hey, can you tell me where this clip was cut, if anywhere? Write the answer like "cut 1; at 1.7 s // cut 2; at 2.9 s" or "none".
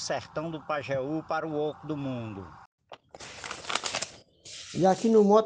none